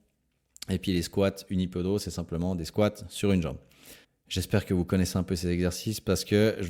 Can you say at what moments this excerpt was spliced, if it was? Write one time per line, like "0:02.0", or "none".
0:04.0